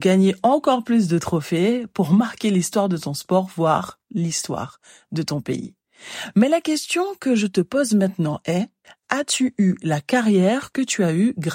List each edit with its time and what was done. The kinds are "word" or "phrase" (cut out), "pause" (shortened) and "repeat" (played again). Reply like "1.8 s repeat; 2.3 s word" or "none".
none